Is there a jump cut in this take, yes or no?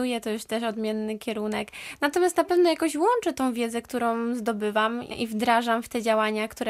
no